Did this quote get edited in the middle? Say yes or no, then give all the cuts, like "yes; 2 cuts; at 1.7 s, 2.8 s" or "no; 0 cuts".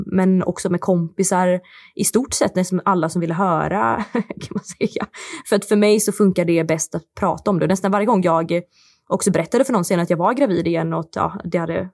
no; 0 cuts